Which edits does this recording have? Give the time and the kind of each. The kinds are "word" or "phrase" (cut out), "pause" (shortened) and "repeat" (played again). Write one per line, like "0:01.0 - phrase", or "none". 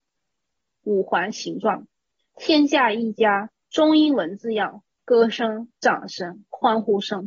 none